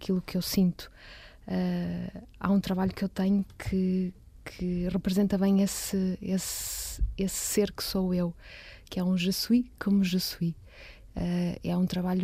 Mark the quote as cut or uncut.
uncut